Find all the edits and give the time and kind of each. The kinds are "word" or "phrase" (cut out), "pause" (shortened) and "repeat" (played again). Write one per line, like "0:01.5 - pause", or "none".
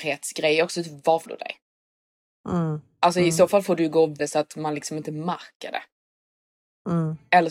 0:01.3 - word
0:04.2 - word